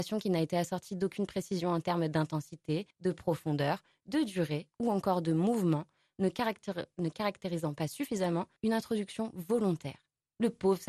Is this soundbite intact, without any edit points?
no; 2 cuts; at 2.9 s, 8.6 s

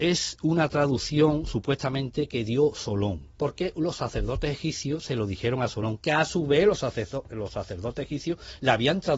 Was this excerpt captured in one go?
no; 1 cut; at 3.3 s

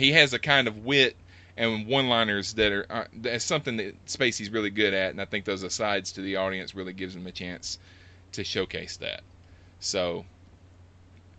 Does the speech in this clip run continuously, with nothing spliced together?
yes; 0 cuts

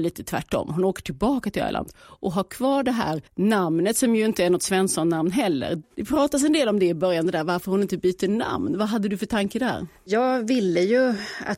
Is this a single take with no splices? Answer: no; 1 cut; at 3.3 s

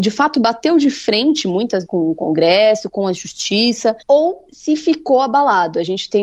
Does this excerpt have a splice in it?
yes; 2 cuts; at 1.9 s, 4.0 s

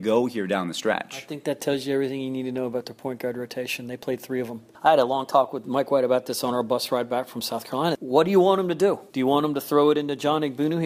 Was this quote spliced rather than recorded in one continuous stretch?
yes; 1 cut; at 9.1 s

